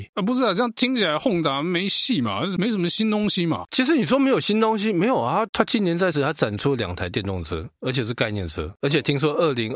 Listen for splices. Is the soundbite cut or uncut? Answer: cut